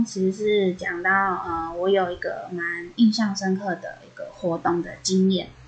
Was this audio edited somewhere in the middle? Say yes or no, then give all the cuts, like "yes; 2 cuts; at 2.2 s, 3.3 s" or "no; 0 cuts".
no; 0 cuts